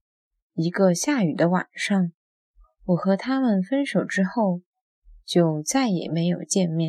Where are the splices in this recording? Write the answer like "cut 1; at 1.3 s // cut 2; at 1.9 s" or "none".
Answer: none